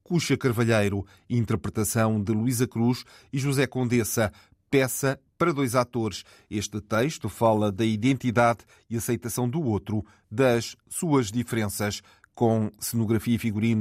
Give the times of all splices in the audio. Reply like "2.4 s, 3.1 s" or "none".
none

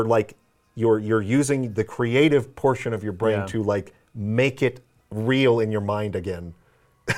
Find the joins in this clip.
5.0 s

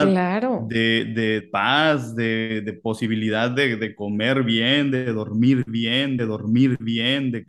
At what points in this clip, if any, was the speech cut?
1.4 s, 6.2 s

